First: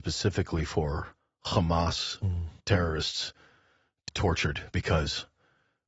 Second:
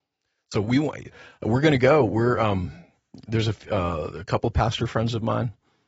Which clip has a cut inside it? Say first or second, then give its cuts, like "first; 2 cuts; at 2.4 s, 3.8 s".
first; 3 cuts; at 1.2 s, 2.6 s, 4.1 s